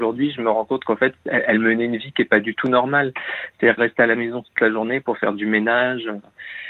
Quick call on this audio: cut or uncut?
cut